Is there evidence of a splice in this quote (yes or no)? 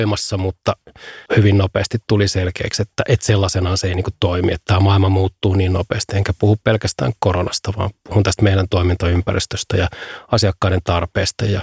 yes